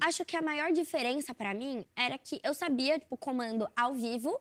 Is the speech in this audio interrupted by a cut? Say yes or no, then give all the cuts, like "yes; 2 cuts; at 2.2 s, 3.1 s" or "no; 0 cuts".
no; 0 cuts